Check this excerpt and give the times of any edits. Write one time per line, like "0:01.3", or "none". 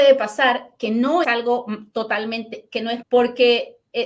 0:01.2
0:03.0